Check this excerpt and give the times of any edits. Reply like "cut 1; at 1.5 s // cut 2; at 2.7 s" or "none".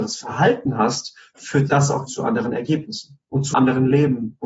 cut 1; at 1.7 s // cut 2; at 2.1 s // cut 3; at 3.5 s